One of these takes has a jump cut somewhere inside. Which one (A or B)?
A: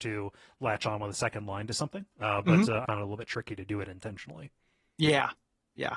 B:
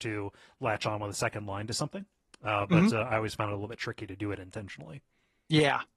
A